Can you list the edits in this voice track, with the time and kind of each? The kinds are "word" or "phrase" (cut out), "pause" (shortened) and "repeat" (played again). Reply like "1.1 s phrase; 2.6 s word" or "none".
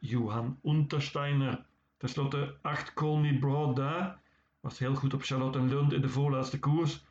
none